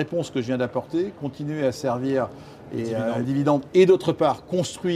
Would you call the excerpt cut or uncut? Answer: cut